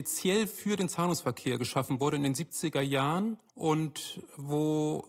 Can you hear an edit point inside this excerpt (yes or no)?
yes